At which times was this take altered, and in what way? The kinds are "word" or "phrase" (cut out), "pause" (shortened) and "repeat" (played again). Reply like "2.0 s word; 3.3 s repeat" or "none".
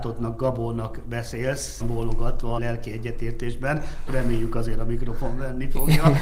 1.8 s word; 2.6 s word; 4.1 s word